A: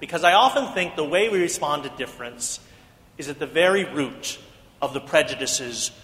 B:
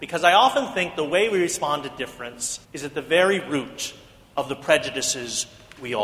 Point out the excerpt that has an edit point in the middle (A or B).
B